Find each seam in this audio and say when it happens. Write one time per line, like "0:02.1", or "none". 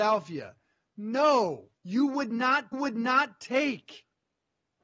0:01.8
0:02.7